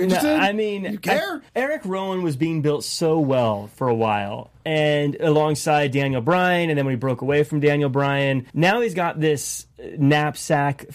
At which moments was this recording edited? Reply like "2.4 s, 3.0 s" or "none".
1.5 s, 8.5 s